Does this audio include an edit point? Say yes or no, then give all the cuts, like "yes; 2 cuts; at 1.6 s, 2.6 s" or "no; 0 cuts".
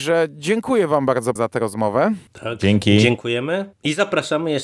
yes; 2 cuts; at 1.4 s, 3.7 s